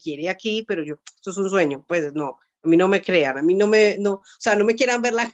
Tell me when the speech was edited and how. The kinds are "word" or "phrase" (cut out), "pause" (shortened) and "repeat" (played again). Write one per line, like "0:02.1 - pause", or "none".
none